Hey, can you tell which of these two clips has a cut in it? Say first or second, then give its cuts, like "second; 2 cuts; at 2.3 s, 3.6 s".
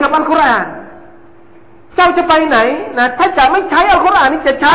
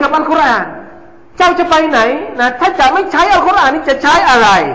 second; 1 cut; at 1.2 s